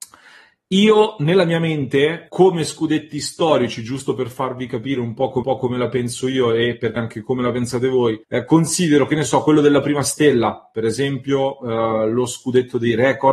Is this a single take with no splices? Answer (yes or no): no